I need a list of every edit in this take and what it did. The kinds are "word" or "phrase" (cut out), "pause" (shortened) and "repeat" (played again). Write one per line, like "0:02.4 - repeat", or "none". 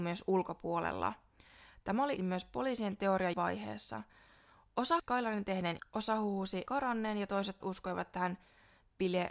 0:02.2 - word
0:03.3 - word
0:05.0 - word
0:05.8 - word
0:06.7 - word
0:07.6 - word